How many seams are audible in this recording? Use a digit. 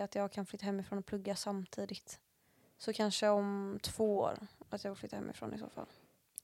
0